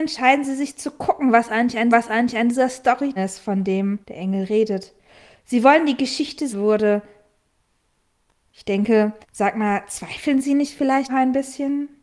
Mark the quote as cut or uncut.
cut